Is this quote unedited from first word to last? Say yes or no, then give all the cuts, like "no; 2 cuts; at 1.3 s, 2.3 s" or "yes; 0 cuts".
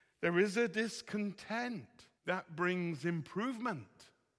no; 1 cut; at 2.2 s